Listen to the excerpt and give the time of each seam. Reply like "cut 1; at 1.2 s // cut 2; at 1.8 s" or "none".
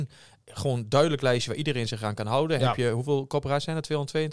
none